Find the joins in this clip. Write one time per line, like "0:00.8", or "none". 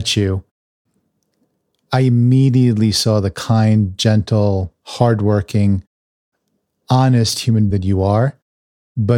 0:07.7